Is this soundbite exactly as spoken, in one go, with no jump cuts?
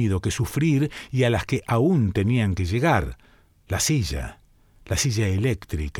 yes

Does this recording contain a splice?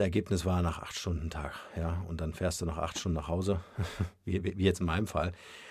no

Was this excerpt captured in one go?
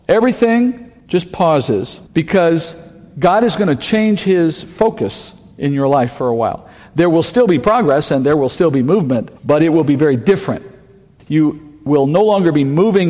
no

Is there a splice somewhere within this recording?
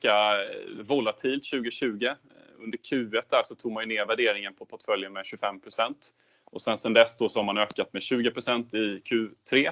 no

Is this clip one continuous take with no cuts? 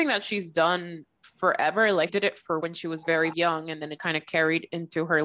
no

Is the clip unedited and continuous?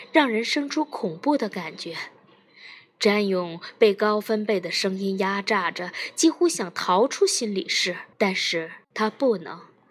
no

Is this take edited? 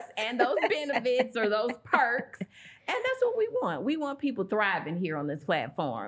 no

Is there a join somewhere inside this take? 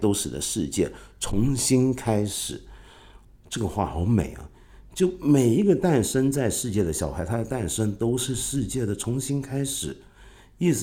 no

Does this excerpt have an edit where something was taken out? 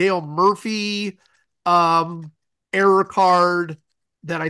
no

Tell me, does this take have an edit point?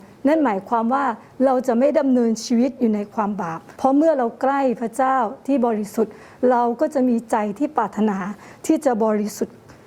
yes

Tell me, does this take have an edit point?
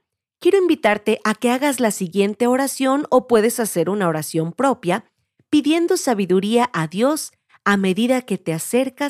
no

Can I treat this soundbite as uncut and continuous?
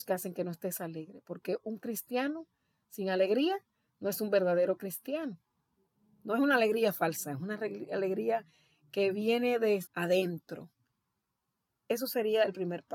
no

